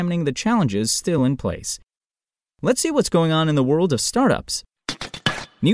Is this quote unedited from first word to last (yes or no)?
yes